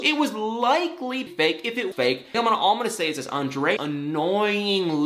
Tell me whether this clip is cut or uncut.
cut